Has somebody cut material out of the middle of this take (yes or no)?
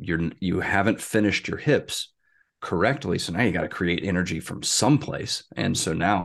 no